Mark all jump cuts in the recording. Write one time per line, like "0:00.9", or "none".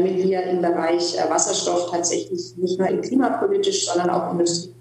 0:02.9